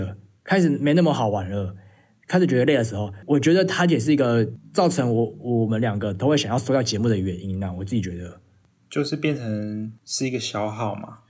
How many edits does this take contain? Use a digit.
1